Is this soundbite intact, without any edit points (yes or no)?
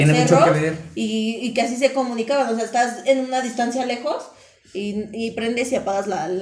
yes